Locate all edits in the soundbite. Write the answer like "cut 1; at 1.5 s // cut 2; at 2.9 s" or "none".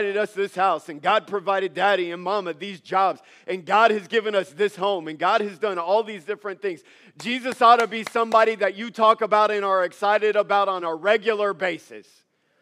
none